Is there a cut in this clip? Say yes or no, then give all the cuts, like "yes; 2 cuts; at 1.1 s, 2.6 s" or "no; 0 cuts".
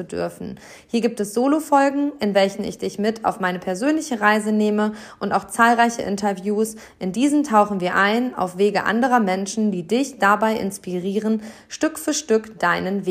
no; 0 cuts